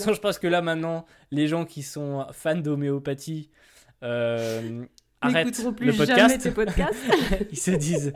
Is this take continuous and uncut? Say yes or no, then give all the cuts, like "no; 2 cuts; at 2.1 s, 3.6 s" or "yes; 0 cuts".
yes; 0 cuts